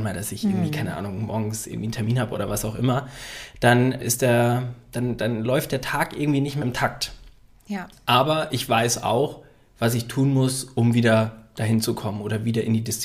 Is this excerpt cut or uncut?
cut